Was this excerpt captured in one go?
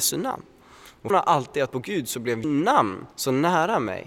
no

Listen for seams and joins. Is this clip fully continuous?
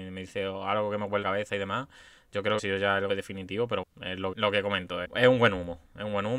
no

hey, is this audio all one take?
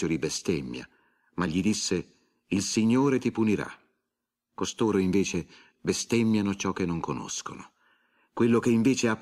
yes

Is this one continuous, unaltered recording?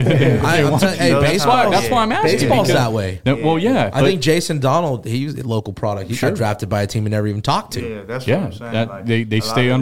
yes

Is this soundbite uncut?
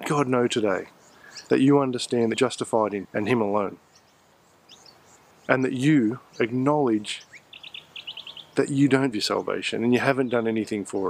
no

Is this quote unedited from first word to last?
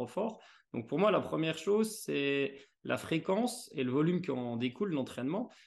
yes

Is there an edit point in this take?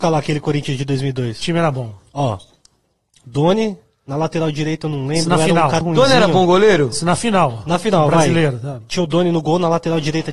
yes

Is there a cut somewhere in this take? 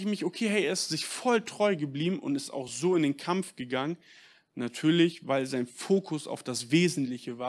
no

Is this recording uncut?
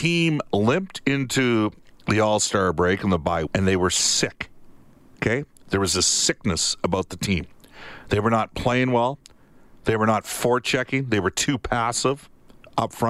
no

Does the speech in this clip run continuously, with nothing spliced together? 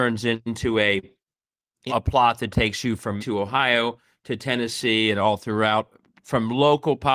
no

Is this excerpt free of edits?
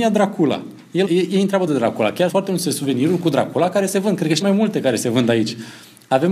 no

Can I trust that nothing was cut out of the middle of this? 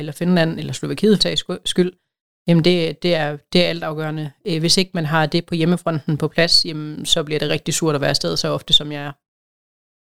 no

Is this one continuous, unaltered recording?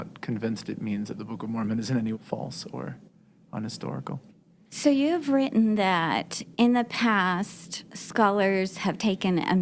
no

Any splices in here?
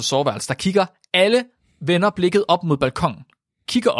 no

